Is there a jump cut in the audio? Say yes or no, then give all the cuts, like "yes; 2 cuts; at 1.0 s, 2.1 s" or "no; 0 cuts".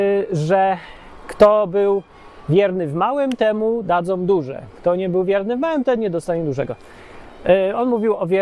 no; 0 cuts